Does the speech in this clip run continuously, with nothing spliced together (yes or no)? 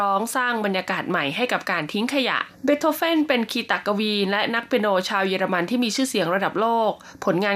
no